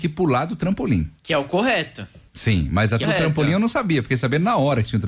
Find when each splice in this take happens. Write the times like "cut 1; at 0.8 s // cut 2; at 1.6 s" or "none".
cut 1; at 1.2 s // cut 2; at 2.3 s // cut 3; at 3.0 s